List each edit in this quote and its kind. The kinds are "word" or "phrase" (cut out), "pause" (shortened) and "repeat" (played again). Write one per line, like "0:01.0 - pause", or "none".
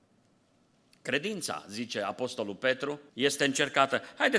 0:03.1 - pause